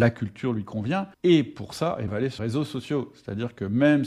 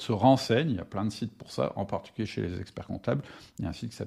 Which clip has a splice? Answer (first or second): first